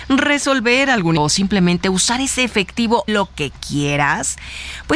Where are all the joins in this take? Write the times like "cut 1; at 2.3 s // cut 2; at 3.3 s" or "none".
cut 1; at 1.2 s // cut 2; at 3.1 s